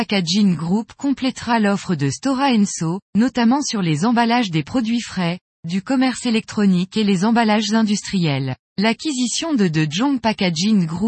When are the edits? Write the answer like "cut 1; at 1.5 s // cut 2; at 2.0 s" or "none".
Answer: cut 1; at 3.0 s // cut 2; at 8.6 s